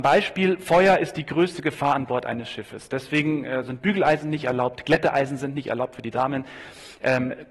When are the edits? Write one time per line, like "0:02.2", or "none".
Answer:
none